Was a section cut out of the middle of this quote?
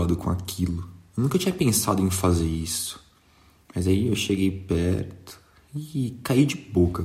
no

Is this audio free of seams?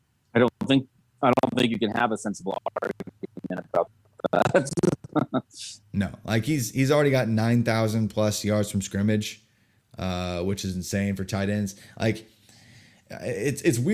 yes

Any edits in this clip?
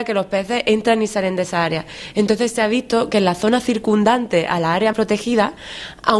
yes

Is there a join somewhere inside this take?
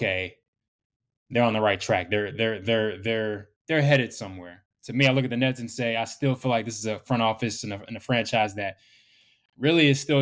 yes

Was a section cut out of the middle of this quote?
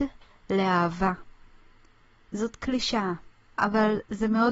no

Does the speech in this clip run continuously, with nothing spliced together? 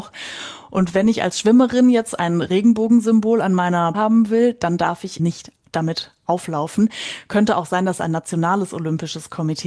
no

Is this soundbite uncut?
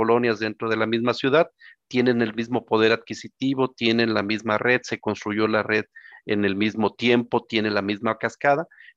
yes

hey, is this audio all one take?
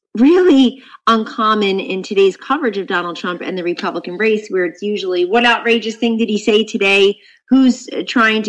yes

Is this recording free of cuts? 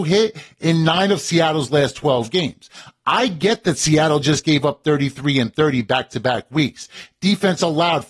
yes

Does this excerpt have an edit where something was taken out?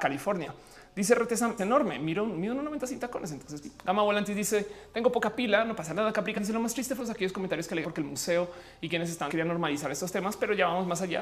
yes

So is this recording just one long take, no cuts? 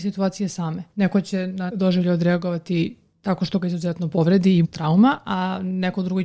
no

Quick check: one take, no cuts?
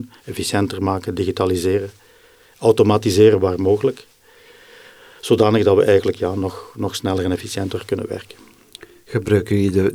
yes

